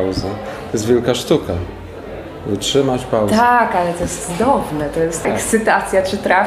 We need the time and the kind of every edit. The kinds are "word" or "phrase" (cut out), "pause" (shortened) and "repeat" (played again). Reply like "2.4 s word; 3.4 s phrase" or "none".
5.2 s word

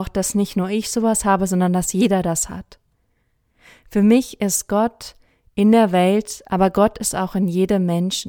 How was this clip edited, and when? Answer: none

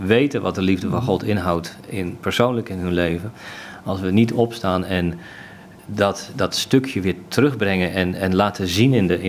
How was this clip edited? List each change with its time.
none

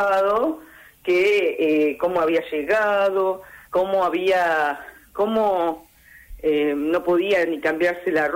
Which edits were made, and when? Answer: 3.7 s pause

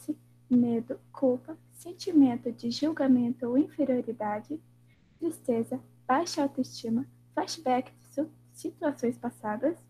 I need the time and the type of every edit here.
1.1 s pause

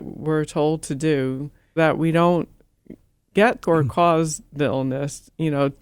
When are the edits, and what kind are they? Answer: 1.8 s word; 3.6 s word

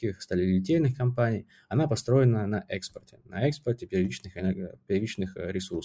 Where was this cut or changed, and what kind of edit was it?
none

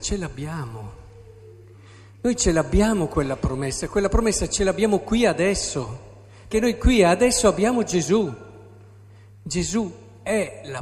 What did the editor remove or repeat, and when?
6.5 s word

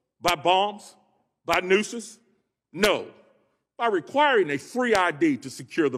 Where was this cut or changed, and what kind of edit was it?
none

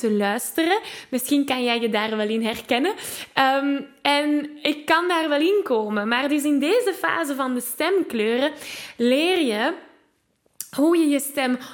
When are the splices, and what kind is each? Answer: none

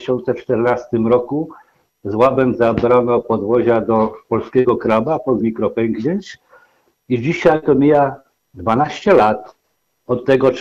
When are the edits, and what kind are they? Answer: 5.4 s word

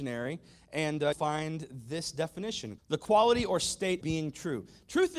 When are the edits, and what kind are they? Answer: 1.1 s word; 2.8 s word; 4.0 s word

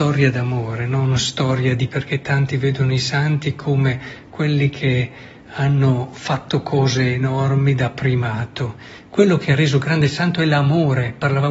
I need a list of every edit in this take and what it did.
1.9 s word

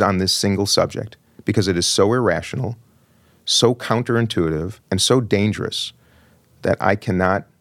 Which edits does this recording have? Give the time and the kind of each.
4.8 s pause

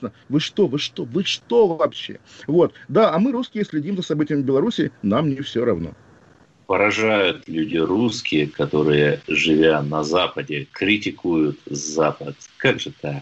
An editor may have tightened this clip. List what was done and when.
none

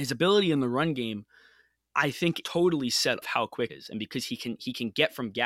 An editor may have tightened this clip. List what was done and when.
2.4 s word; 3.2 s phrase; 3.7 s word

